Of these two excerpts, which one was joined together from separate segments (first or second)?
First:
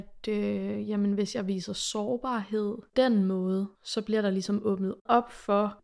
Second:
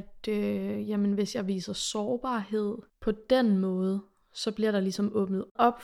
first